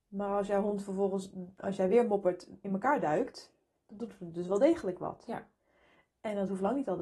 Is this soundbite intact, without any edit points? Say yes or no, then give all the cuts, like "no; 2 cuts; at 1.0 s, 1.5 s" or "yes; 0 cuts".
yes; 0 cuts